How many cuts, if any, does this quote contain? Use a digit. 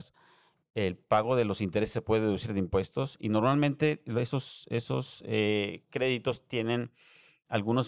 0